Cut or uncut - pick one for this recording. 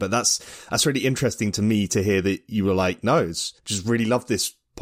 cut